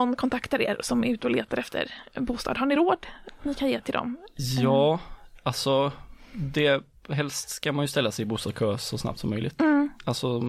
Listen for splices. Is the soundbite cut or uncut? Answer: uncut